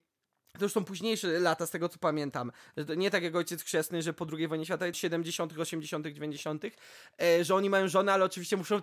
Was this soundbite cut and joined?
yes; 1 cut; at 4.9 s

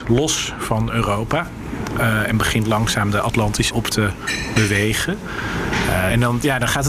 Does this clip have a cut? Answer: yes; 1 cut; at 3.7 s

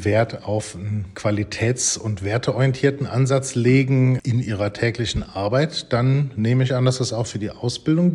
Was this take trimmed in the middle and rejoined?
no; 0 cuts

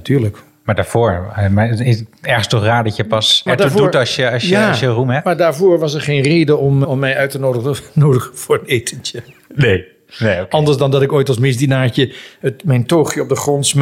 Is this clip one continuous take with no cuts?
no; 2 cuts; at 3.5 s, 6.8 s

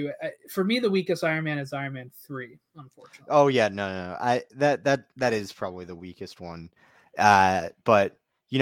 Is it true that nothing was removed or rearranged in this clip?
yes; 0 cuts

